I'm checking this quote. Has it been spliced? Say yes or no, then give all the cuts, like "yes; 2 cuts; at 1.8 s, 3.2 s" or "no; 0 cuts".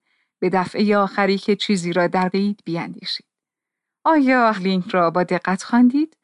yes; 2 cuts; at 2.3 s, 4.6 s